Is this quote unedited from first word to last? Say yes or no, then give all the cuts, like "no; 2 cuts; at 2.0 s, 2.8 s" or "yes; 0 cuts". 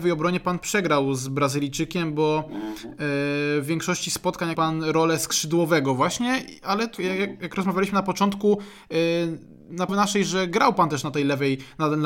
no; 3 cuts; at 4.5 s, 7.0 s, 9.9 s